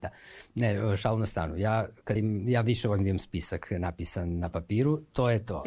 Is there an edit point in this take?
yes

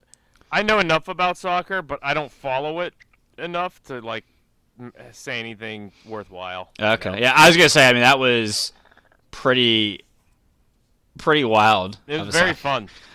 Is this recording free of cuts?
yes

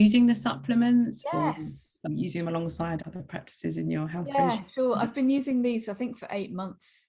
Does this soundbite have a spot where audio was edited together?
yes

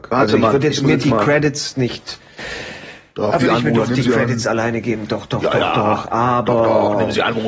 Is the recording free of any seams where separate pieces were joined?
no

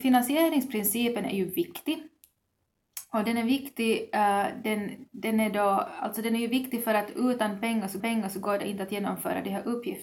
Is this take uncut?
no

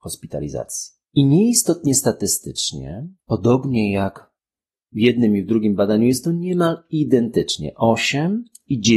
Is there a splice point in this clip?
yes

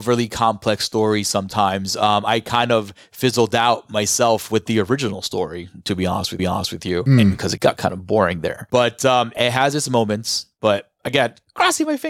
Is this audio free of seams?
no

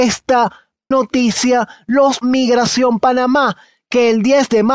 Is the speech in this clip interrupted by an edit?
yes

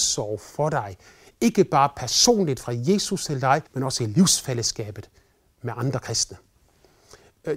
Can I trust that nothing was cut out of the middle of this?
no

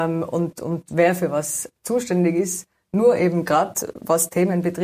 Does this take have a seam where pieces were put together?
no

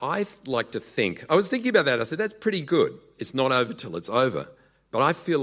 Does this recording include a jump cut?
no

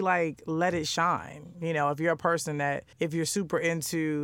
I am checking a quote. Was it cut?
yes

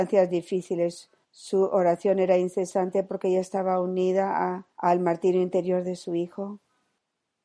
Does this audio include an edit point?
yes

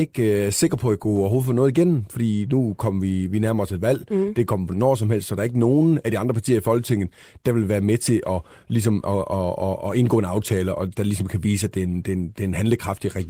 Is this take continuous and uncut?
yes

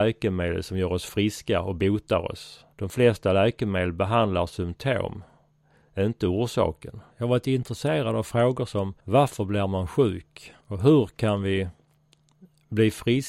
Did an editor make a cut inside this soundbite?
yes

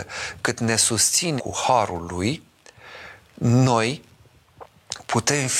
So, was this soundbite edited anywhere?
yes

